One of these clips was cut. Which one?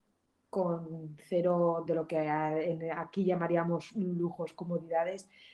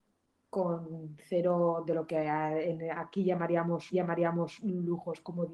second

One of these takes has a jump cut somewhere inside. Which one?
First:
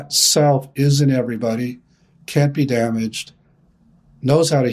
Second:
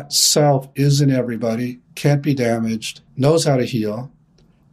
second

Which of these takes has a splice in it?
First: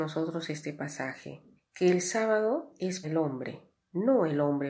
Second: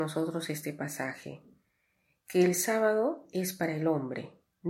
first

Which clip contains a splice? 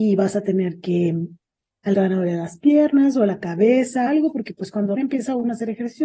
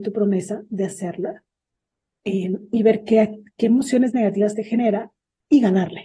first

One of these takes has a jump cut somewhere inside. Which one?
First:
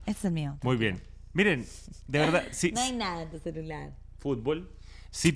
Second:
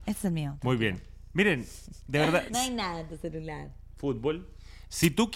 second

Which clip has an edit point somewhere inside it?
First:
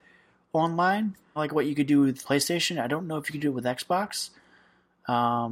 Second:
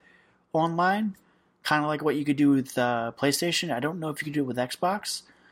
first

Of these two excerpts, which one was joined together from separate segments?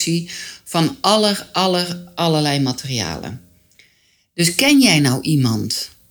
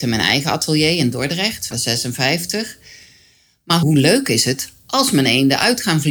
second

